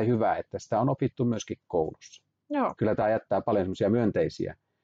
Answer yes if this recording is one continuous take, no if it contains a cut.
yes